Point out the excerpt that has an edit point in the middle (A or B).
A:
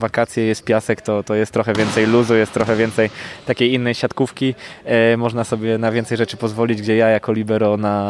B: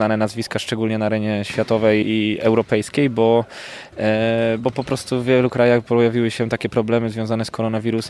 B